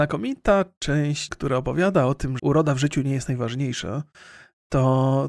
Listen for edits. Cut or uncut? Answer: cut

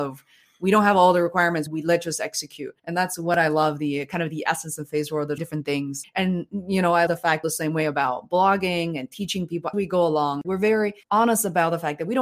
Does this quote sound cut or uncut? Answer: cut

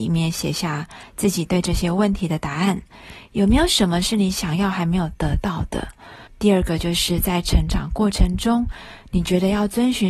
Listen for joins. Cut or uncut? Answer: cut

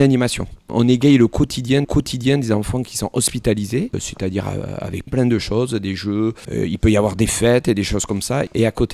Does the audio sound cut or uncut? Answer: cut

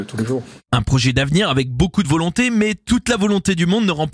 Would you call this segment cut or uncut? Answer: uncut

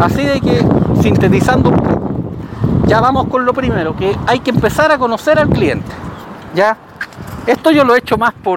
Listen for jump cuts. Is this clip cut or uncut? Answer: uncut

